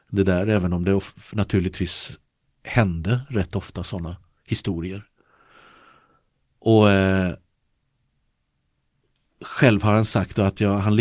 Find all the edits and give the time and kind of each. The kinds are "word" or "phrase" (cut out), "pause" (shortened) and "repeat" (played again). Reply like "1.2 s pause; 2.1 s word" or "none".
none